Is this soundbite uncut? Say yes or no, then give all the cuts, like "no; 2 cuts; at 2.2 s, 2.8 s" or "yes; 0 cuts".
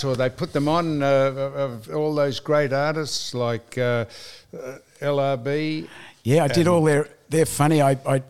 no; 1 cut; at 1.8 s